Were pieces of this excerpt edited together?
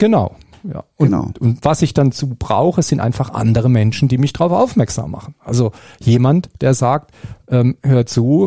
no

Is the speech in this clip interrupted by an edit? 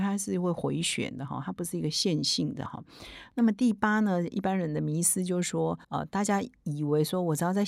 yes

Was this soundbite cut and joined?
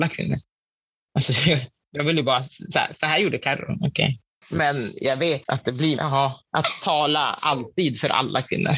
yes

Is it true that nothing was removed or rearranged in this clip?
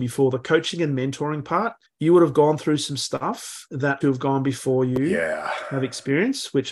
no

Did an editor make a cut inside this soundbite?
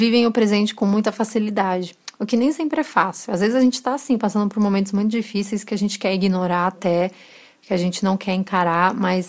no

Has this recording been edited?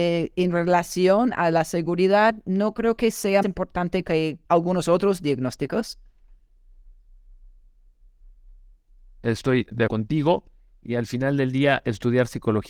yes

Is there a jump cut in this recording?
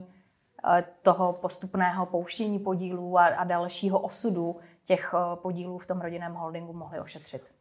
no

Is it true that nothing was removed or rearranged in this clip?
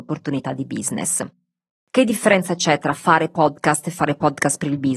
yes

